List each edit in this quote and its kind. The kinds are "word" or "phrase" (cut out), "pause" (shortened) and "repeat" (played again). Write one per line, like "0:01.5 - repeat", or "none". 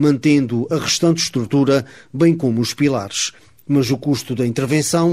none